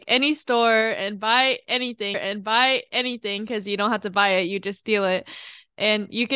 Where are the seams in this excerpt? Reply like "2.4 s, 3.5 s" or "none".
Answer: 2.1 s